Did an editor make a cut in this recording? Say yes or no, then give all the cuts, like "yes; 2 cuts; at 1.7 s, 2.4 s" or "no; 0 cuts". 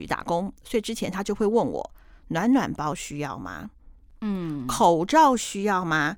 no; 0 cuts